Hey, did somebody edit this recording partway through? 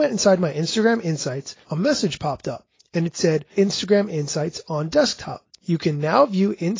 yes; 3 cuts; at 1.6 s, 3.5 s, 5.5 s

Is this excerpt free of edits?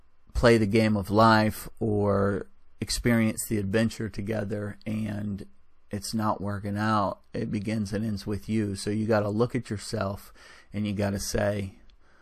yes; 0 cuts

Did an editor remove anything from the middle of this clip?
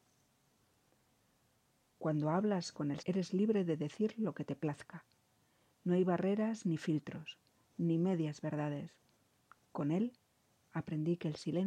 yes; 1 cut; at 3.0 s

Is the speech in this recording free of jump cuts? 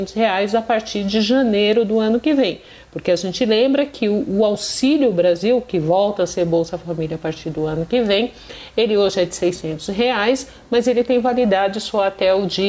yes; 0 cuts

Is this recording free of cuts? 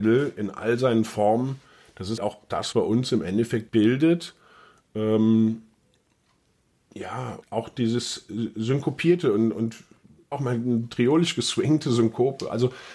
no; 5 cuts; at 2.2 s, 2.7 s, 3.7 s, 7.4 s, 10.3 s

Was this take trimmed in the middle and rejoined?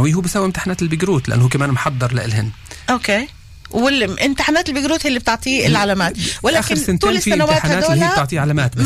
no; 0 cuts

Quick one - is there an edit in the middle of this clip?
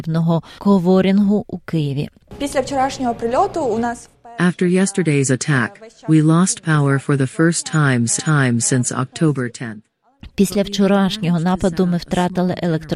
yes; 1 cut; at 8.2 s

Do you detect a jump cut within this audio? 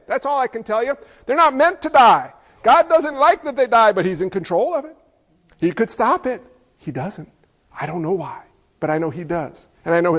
no; 0 cuts

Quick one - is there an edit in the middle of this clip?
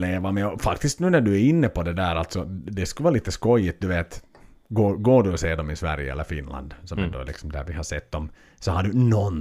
no; 0 cuts

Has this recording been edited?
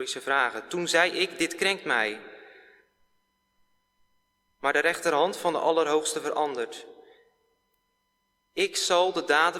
no; 0 cuts

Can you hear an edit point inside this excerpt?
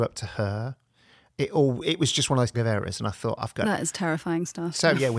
yes; 1 cut; at 2.5 s

